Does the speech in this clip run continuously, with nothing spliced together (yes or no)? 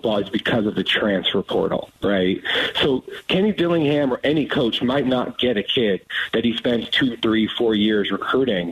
no